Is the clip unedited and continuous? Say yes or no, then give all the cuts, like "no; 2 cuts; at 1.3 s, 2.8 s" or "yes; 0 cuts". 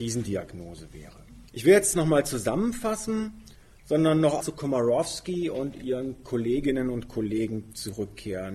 no; 3 cuts; at 1.5 s, 1.9 s, 4.4 s